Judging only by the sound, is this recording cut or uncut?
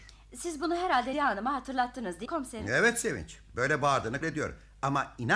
cut